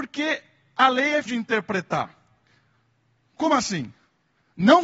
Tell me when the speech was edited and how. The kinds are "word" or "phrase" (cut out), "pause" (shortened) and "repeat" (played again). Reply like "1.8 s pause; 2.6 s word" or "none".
1.3 s word

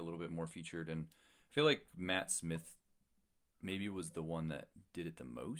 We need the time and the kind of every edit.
none

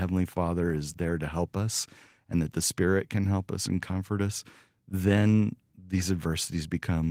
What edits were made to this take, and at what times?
none

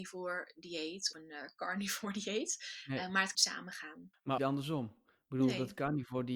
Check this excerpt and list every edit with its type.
1.1 s word; 3.3 s phrase; 4.4 s phrase

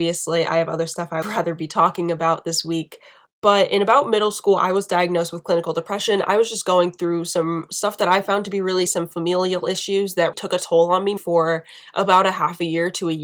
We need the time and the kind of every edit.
1.2 s word; 8.9 s word; 10.3 s word; 11.2 s word

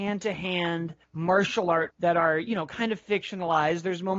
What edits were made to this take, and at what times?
1.0 s pause; 1.9 s word

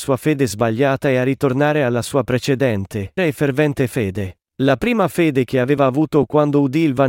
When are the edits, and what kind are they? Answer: 3.2 s word

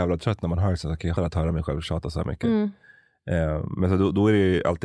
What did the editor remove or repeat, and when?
1.2 s word

